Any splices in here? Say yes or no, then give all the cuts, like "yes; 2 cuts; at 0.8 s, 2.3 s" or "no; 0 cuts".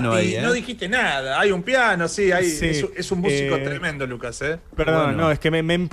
no; 0 cuts